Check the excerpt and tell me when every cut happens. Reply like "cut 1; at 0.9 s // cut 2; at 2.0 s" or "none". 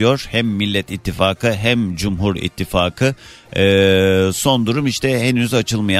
none